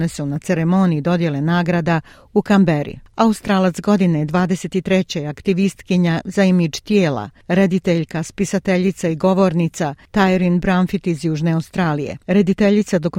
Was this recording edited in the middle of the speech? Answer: no; 0 cuts

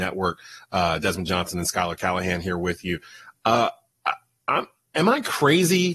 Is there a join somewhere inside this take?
no; 0 cuts

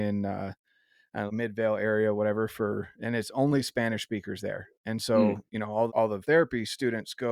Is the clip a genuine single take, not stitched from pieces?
no; 3 cuts; at 1.3 s, 5.9 s, 6.2 s

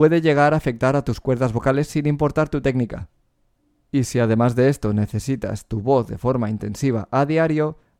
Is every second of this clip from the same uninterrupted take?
yes; 0 cuts

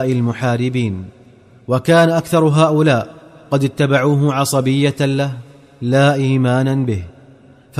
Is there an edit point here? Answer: no; 0 cuts

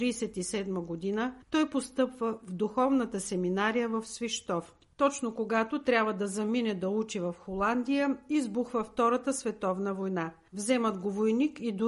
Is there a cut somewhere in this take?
yes; 2 cuts; at 1.4 s, 10.5 s

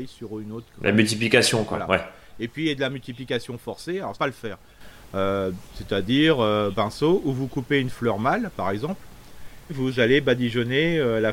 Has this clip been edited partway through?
yes; 3 cuts; at 4.1 s, 6.7 s, 9.7 s

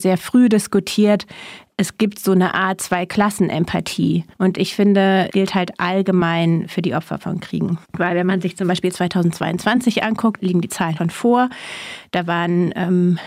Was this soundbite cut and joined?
yes; 5 cuts; at 4.3 s, 5.3 s, 7.8 s, 10.4 s, 11.0 s

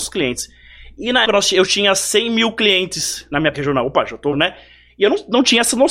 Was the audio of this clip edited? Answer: yes; 3 cuts; at 1.3 s, 3.5 s, 4.3 s

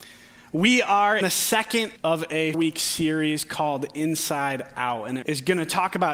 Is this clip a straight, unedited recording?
no; 4 cuts; at 1.2 s, 2.0 s, 2.5 s, 5.2 s

